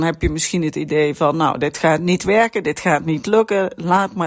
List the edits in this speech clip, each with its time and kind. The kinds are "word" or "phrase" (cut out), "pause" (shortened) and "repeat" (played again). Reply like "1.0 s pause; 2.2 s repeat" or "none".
none